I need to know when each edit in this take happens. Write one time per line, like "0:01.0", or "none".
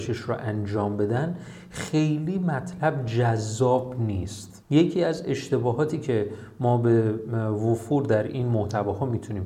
0:04.6